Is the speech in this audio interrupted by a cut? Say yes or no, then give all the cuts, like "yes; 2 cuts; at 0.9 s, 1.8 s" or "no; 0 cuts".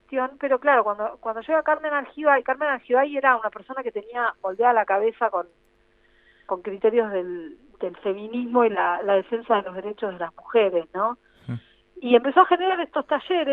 no; 0 cuts